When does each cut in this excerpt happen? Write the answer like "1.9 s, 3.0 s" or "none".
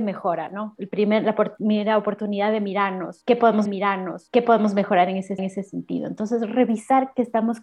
3.7 s, 5.4 s